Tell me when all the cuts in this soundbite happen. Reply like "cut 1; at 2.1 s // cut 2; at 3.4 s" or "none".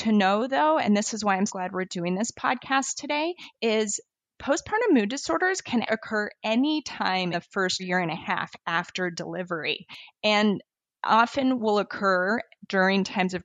cut 1; at 1.5 s // cut 2; at 5.9 s // cut 3; at 7.3 s // cut 4; at 7.8 s